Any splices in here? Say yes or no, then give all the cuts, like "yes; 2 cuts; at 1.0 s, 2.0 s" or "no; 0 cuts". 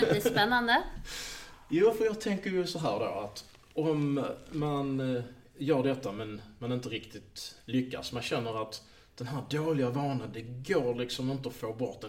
no; 0 cuts